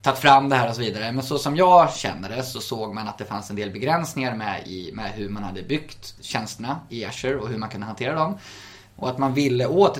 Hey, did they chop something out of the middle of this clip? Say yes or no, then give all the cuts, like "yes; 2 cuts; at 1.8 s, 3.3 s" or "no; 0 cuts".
yes; 1 cut; at 6.2 s